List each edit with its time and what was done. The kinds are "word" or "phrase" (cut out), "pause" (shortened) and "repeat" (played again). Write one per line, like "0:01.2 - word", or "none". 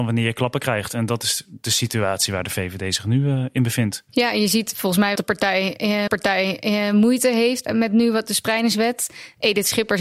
0:04.1 - pause
0:05.2 - phrase
0:06.1 - repeat
0:07.7 - word